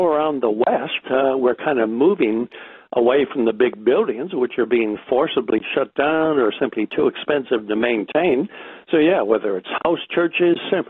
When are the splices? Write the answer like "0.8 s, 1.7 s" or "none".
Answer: none